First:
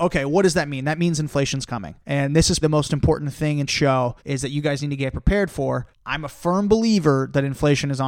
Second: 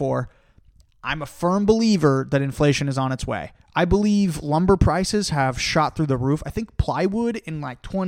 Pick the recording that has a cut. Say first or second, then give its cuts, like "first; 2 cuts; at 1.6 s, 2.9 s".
first; 5 cuts; at 2.0 s, 2.6 s, 3.7 s, 4.2 s, 5.9 s